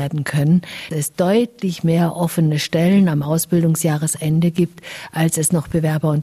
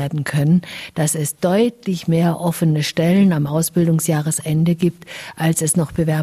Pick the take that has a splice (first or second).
first